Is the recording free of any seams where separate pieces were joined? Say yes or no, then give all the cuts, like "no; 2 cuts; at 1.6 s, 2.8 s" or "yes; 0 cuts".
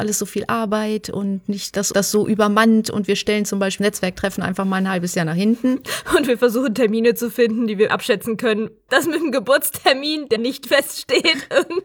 no; 5 cuts; at 1.9 s, 3.8 s, 7.9 s, 8.9 s, 10.4 s